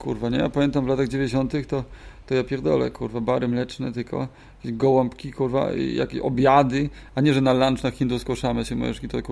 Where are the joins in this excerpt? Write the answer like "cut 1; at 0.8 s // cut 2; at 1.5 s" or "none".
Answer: none